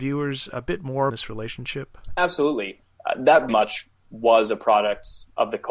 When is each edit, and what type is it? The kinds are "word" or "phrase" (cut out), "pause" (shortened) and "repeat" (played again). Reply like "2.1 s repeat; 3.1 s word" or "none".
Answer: 1.1 s phrase; 3.5 s word